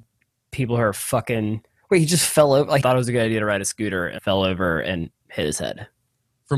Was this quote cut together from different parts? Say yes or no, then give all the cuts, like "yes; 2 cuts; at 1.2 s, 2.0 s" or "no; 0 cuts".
yes; 2 cuts; at 2.8 s, 4.2 s